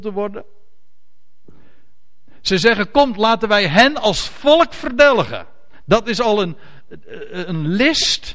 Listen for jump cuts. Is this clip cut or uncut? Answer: uncut